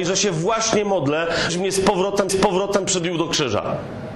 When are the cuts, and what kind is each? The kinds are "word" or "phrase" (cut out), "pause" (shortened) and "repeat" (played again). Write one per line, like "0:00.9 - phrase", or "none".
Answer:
0:01.5 - word
0:02.3 - repeat